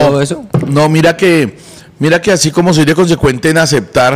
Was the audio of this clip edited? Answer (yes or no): no